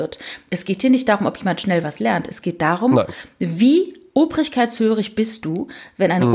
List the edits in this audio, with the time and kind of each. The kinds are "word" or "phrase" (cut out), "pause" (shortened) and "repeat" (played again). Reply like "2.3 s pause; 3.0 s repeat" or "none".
none